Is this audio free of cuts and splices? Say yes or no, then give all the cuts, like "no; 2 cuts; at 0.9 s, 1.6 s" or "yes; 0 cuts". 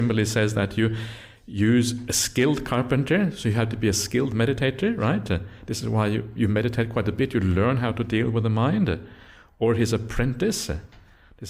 yes; 0 cuts